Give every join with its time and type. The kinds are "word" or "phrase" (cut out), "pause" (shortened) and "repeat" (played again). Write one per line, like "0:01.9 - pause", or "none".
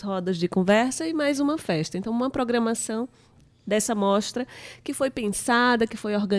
none